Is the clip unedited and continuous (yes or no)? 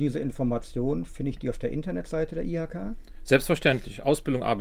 yes